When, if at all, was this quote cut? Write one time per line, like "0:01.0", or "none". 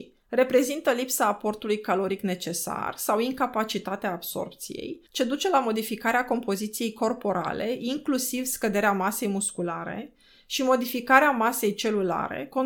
0:05.1